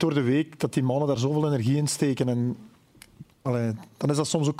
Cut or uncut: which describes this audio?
uncut